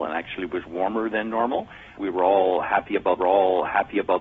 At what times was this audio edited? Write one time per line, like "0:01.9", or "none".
0:02.0
0:03.2